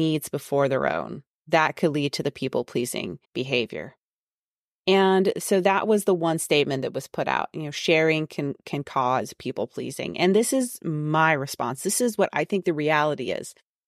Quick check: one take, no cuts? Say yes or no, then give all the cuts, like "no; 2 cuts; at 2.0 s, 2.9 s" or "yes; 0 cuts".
no; 2 cuts; at 1.3 s, 3.2 s